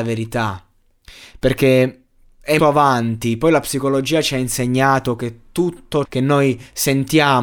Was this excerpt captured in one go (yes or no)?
no